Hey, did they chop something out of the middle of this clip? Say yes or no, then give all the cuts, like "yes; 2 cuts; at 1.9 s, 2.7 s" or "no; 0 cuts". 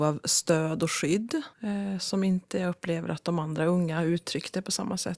yes; 1 cut; at 1.5 s